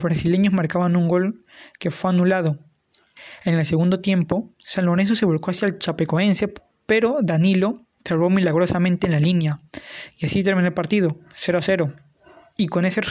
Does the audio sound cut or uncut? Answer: uncut